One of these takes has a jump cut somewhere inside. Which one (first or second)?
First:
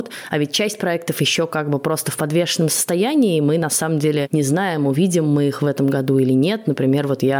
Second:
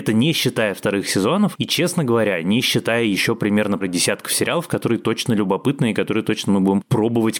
second